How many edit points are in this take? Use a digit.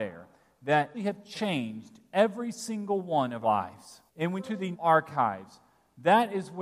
5